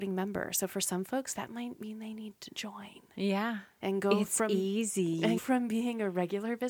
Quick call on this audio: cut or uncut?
cut